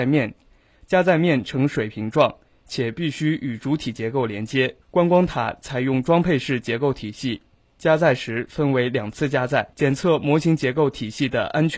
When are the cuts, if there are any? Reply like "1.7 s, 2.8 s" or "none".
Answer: 4.8 s, 9.7 s